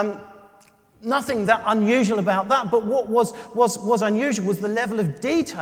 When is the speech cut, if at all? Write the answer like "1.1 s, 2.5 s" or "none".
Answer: none